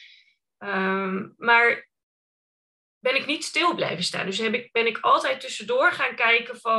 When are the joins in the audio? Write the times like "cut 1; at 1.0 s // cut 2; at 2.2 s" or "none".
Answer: none